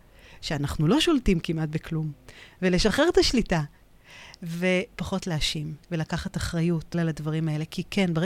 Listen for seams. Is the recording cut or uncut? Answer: cut